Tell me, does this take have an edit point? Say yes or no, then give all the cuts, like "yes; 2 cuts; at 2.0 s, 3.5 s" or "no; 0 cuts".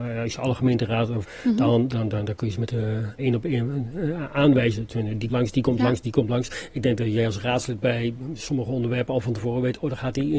yes; 4 cuts; at 1.2 s, 2.1 s, 3.2 s, 5.3 s